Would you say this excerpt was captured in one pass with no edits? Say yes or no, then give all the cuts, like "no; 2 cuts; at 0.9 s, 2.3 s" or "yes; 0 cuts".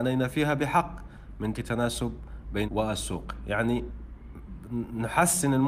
no; 2 cuts; at 1.5 s, 2.6 s